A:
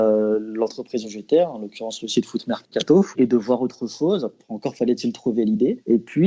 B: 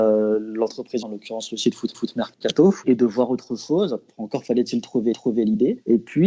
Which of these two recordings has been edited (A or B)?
B